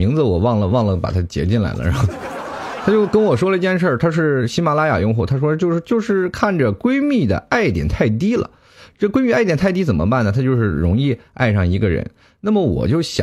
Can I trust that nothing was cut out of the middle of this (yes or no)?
yes